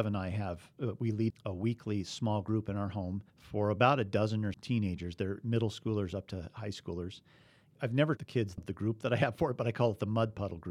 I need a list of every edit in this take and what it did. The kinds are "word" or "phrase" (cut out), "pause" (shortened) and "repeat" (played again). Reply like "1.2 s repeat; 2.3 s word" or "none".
1.3 s word; 3.3 s pause; 4.5 s word; 8.2 s word; 8.6 s word